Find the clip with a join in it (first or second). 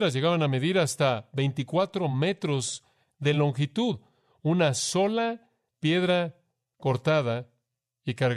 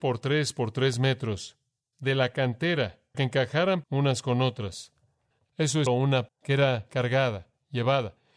second